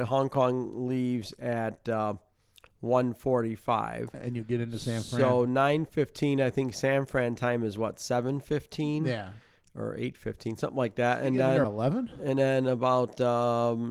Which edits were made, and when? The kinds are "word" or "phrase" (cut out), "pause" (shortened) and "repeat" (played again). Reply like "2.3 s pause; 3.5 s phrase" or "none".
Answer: 11.6 s word